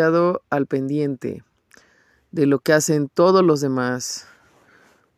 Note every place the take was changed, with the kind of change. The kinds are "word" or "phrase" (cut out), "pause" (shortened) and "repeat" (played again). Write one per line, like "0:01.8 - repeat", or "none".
none